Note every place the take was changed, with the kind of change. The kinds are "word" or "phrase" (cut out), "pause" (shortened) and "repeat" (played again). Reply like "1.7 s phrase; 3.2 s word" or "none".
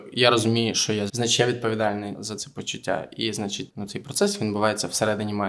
1.1 s word; 2.1 s word; 3.7 s word